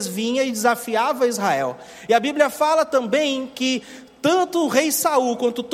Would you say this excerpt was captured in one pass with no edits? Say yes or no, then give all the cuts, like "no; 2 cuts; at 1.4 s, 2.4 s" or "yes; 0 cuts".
yes; 0 cuts